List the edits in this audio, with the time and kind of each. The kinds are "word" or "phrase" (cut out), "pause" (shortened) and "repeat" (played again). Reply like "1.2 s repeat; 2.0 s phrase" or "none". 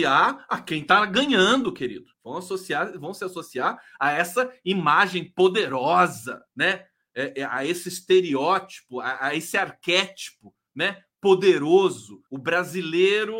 2.1 s pause; 6.5 s pause; 12.3 s pause